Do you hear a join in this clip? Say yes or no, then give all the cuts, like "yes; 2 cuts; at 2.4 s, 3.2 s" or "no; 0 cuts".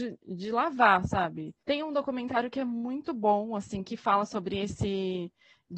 no; 0 cuts